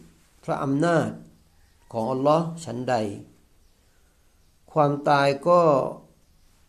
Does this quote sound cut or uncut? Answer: uncut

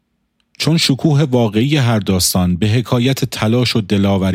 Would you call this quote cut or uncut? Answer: uncut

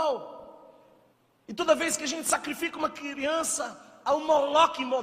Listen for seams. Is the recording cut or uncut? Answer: cut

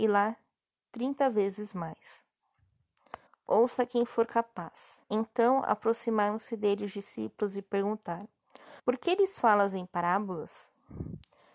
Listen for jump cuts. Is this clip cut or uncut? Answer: cut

